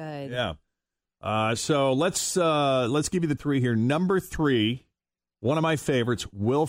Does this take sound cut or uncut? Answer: cut